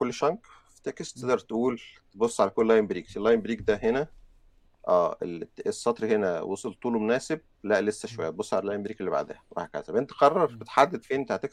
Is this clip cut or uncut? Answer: uncut